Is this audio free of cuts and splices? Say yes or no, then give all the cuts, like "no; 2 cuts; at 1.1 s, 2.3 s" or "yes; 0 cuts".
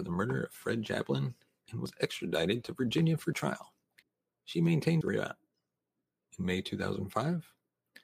no; 2 cuts; at 4.0 s, 5.0 s